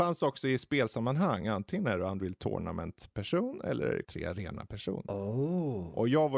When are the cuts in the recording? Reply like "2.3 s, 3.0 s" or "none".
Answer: 4.0 s